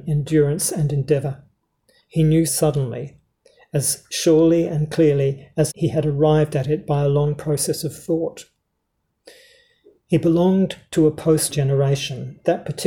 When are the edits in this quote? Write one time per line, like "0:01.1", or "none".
0:02.5
0:05.7
0:11.5